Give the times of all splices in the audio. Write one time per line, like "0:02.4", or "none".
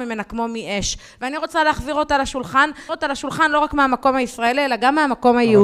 0:02.9